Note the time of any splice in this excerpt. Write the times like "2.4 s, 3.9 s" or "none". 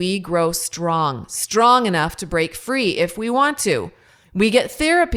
none